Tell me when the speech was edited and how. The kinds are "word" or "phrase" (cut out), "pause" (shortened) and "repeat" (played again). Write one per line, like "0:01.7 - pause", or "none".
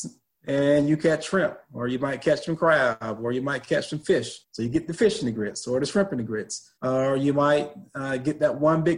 0:04.4 - pause
0:06.8 - pause